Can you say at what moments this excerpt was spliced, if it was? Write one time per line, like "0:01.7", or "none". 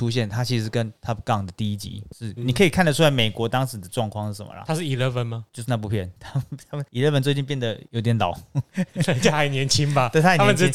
0:02.4